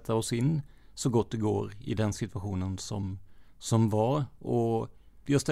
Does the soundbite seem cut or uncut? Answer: cut